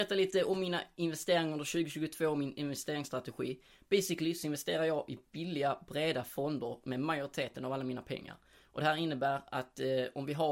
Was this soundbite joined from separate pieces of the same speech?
no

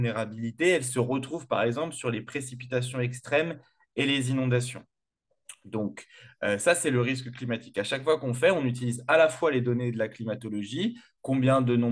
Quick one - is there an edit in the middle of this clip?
no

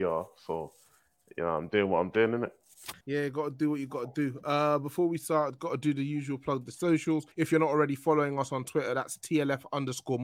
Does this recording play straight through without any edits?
no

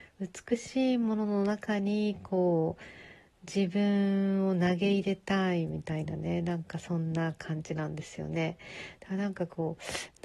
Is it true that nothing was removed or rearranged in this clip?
yes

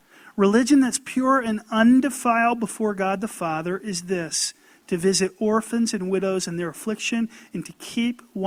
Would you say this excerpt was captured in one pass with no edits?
yes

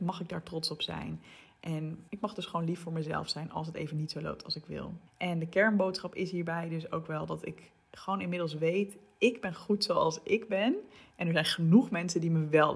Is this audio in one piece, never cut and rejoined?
no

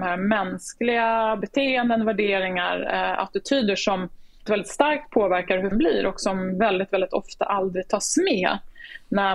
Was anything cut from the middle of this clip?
yes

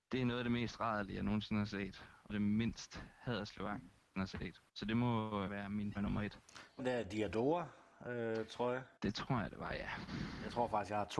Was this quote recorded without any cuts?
no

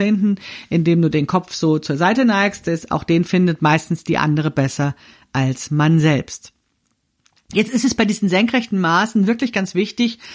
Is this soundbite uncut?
yes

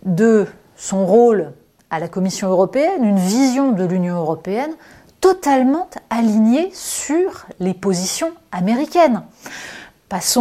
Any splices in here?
no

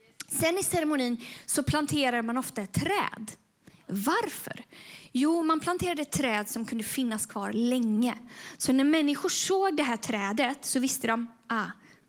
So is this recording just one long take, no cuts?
yes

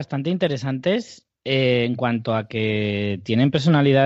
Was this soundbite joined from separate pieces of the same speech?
no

